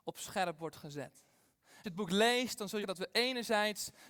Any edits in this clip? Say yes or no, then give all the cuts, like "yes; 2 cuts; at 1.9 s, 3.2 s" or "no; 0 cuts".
yes; 2 cuts; at 1.8 s, 2.8 s